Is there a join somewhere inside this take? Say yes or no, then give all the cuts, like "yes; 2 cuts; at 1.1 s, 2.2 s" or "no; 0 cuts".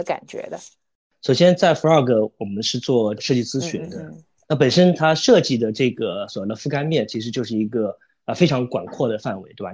no; 0 cuts